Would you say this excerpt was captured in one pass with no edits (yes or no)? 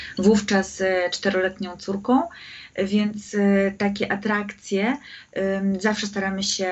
yes